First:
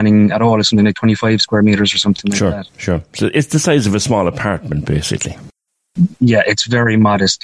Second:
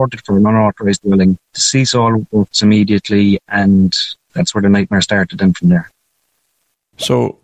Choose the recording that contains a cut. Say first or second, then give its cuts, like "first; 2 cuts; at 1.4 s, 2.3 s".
second; 2 cuts; at 1.4 s, 4.2 s